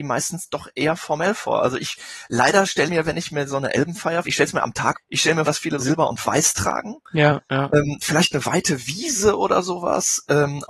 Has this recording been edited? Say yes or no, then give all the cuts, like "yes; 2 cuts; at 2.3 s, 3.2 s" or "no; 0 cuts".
yes; 5 cuts; at 2.9 s, 4.2 s, 4.9 s, 5.4 s, 5.8 s